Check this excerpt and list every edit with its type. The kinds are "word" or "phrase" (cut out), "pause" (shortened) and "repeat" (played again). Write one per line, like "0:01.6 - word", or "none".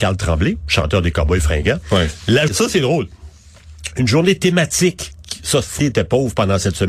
0:02.5 - word
0:05.8 - phrase